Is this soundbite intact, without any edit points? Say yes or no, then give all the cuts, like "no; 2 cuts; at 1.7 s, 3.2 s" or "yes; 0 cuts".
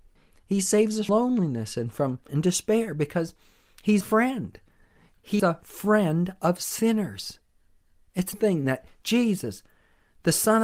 no; 5 cuts; at 1.1 s, 2.3 s, 4.0 s, 5.4 s, 8.3 s